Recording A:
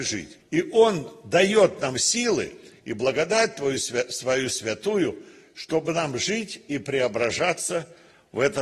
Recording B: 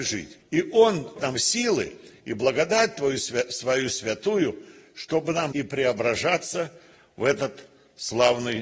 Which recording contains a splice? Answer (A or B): B